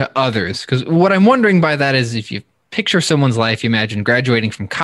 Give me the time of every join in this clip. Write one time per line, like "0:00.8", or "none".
none